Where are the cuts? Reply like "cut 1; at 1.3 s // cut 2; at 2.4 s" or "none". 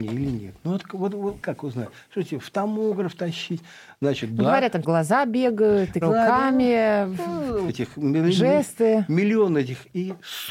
cut 1; at 1.4 s // cut 2; at 4.8 s // cut 3; at 6.0 s // cut 4; at 7.7 s